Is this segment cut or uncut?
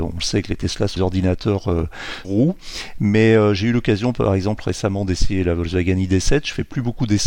cut